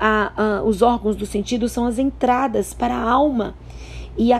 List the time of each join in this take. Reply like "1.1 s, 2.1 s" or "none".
none